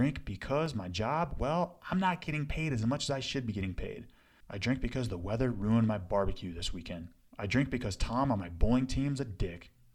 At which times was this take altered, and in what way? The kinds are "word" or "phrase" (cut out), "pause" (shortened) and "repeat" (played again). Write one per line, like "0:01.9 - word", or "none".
none